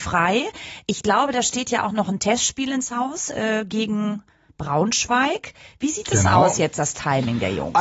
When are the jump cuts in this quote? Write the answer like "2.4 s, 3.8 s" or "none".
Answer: none

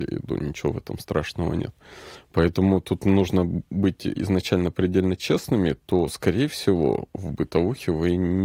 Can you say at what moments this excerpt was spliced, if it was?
4.2 s

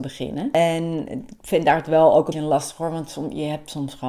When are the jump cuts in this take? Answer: 2.3 s

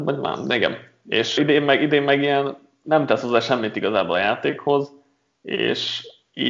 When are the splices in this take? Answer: 1.4 s

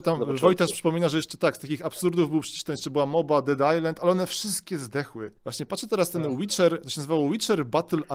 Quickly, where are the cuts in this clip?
5.4 s

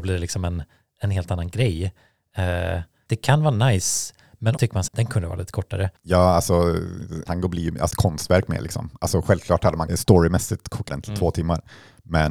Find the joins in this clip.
3.1 s, 4.6 s, 4.9 s, 7.3 s, 7.9 s, 9.9 s, 10.9 s

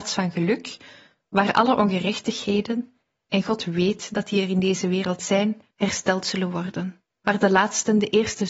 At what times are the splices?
5.7 s, 7.1 s

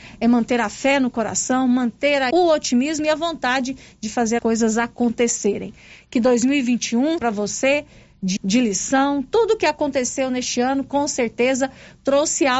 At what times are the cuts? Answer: 2.3 s, 4.4 s, 7.2 s, 8.4 s

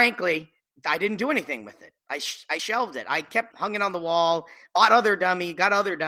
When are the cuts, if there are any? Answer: 3.5 s

